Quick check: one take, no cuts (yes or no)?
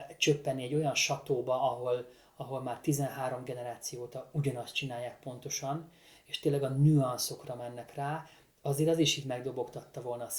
yes